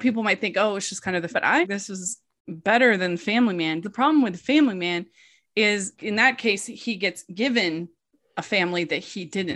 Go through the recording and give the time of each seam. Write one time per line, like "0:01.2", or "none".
0:01.3
0:01.6
0:03.8
0:05.9